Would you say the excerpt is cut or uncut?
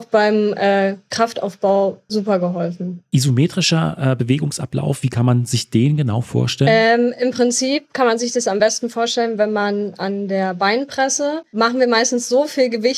uncut